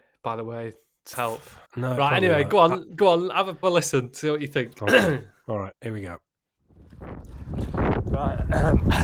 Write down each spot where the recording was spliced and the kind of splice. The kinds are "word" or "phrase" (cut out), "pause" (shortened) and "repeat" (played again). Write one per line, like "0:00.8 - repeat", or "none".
0:01.1 - phrase
0:01.7 - pause
0:03.6 - word
0:05.8 - pause